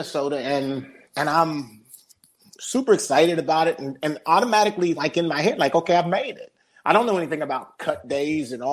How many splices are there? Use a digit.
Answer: 1